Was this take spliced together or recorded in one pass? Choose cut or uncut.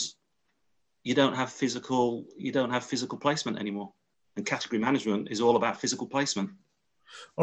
uncut